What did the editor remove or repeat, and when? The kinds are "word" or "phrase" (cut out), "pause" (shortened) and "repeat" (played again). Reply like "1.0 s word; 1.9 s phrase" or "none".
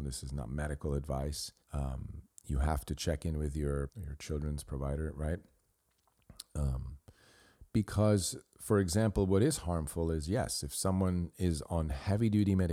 1.6 s pause; 3.9 s word